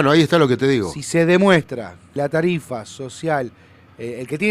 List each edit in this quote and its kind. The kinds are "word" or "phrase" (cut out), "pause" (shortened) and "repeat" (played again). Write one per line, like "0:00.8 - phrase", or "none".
0:02.2 - word